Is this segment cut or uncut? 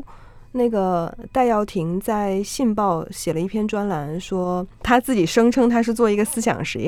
cut